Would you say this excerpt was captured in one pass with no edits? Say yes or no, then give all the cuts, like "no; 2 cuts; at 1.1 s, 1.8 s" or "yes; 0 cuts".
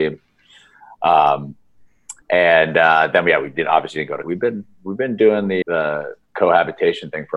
no; 3 cuts; at 2.2 s, 4.2 s, 5.6 s